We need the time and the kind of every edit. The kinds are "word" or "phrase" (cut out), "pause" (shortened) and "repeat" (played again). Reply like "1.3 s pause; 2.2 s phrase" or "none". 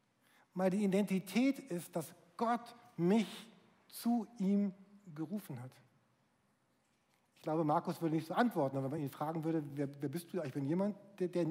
none